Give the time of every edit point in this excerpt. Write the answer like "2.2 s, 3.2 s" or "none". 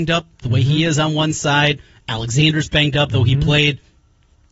none